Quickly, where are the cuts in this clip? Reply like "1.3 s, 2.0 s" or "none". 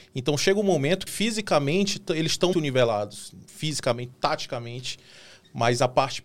1.1 s, 2.5 s, 4.1 s